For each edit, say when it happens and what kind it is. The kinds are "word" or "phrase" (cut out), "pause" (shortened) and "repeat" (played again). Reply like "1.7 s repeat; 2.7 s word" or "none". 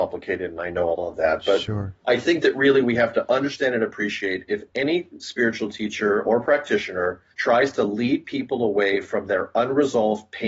2.0 s pause; 7.3 s pause